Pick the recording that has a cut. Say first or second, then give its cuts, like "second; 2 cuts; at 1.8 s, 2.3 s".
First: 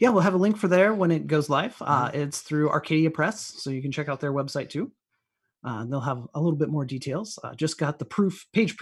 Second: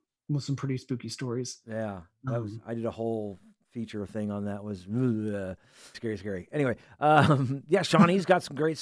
second; 1 cut; at 5.9 s